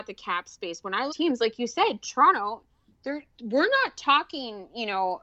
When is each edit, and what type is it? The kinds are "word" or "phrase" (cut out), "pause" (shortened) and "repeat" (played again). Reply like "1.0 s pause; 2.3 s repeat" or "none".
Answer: 1.1 s phrase; 3.3 s pause